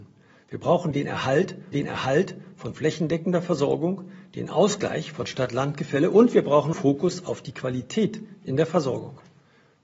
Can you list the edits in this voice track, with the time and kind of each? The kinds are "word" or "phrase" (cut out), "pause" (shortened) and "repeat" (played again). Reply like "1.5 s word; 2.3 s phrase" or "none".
1.7 s repeat; 6.7 s phrase